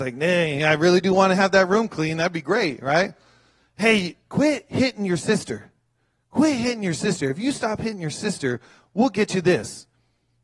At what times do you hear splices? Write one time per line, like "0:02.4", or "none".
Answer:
none